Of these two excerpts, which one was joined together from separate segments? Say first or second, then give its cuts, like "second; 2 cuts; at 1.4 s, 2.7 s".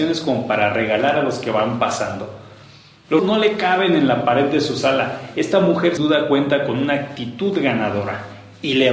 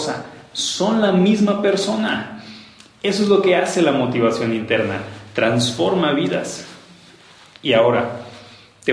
first; 2 cuts; at 3.2 s, 6.0 s